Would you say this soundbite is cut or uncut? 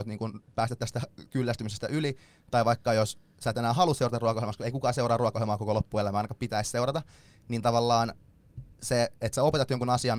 uncut